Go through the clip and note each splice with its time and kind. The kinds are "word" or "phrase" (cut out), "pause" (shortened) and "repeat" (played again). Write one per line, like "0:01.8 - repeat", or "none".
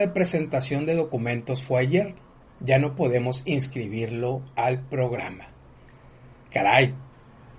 none